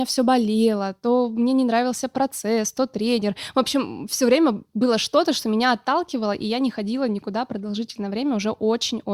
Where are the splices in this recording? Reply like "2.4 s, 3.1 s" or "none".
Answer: none